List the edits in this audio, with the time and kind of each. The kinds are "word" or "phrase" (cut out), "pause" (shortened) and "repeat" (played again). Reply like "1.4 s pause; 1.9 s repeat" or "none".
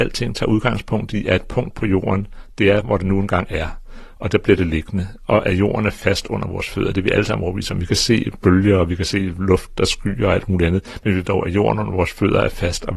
11.2 s word